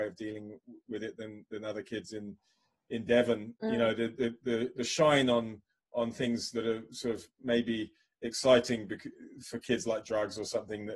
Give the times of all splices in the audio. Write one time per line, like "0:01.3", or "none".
0:07.3